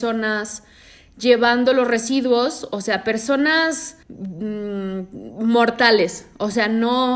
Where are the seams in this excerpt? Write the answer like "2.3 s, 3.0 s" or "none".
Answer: 4.0 s